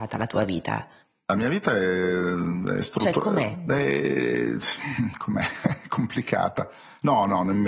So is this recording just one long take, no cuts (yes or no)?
yes